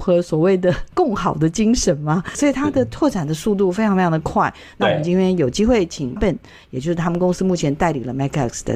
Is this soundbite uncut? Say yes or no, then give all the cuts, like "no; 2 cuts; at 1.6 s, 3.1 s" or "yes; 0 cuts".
no; 1 cut; at 6.2 s